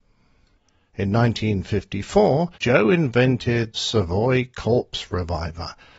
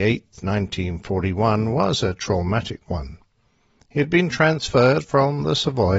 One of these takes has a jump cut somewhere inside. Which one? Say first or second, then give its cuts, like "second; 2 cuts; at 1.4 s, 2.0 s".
first; 2 cuts; at 2.5 s, 3.7 s